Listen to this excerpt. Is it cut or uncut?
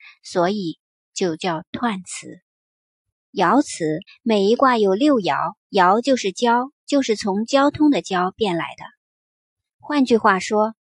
cut